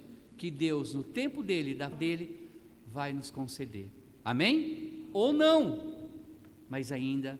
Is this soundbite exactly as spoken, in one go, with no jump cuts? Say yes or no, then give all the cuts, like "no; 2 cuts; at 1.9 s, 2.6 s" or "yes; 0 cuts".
no; 1 cut; at 1.9 s